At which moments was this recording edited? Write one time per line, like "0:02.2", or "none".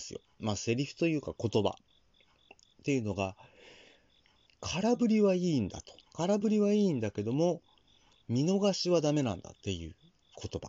0:06.0
0:09.6